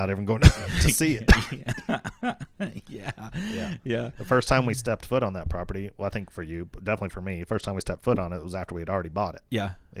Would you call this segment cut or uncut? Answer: uncut